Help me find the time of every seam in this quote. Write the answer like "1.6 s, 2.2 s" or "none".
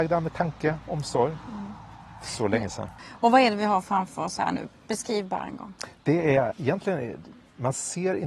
6.5 s